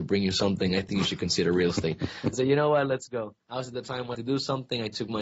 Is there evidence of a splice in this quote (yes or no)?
yes